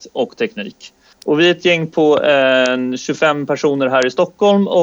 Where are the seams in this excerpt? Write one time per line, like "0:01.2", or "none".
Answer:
0:01.1